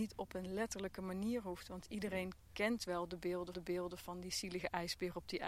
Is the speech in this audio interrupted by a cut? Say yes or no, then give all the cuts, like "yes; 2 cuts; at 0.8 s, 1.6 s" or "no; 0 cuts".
yes; 1 cut; at 3.5 s